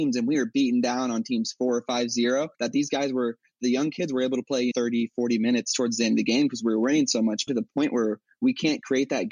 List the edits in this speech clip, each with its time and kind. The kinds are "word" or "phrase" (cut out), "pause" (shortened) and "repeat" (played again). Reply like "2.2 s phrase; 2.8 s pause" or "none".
2.5 s pause; 4.7 s word; 7.5 s phrase